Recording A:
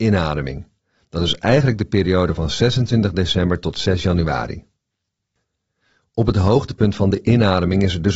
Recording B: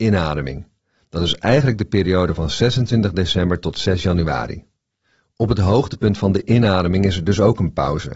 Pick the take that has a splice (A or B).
B